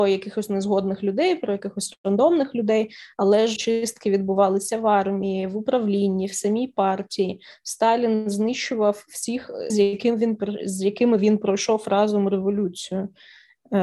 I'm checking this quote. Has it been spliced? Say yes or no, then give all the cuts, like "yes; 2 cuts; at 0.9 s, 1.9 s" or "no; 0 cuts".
yes; 2 cuts; at 3.6 s, 9.7 s